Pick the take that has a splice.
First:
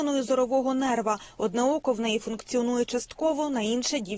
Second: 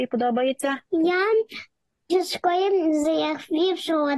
second; 1 cut; at 2.1 s

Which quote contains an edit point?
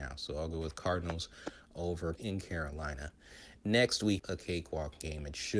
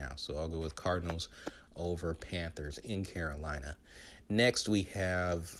first; 2 cuts; at 2.2 s, 4.2 s

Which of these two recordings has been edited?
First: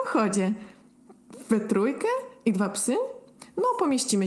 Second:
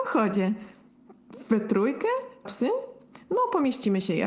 second; 1 cut; at 2.5 s

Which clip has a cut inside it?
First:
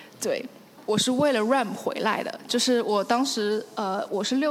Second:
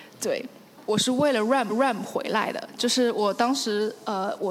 second; 1 cut; at 1.7 s

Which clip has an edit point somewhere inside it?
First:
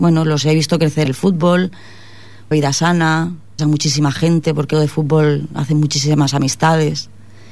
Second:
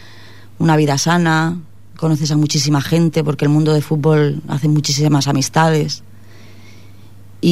first; 4 cuts; at 1.1 s, 2.5 s, 3.6 s, 4.7 s

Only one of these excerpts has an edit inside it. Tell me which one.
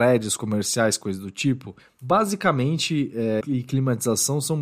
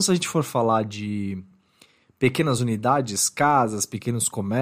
first; 2 cuts; at 1.8 s, 3.4 s

